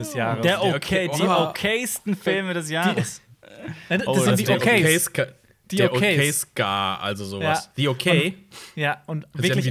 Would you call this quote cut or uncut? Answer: uncut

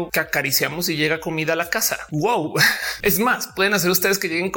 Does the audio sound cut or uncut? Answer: uncut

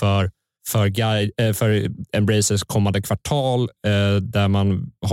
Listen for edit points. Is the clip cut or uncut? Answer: uncut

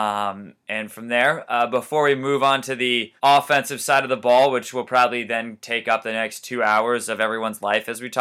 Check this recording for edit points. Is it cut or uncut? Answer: cut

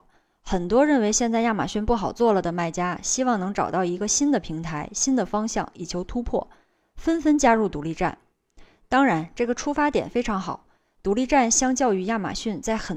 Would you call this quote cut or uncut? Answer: uncut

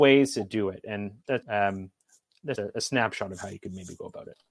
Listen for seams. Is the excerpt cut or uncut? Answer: cut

